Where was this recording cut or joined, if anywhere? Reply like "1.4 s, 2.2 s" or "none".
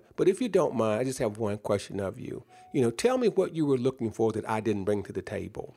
none